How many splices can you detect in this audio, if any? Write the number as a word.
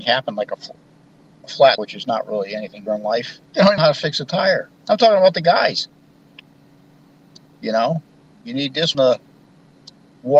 six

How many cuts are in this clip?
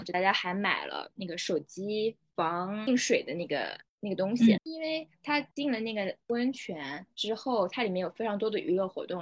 three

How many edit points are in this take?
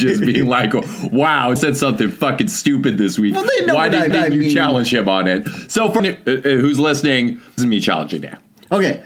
four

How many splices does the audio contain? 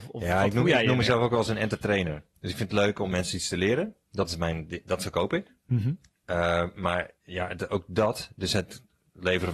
three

